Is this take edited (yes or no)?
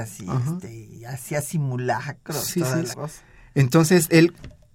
yes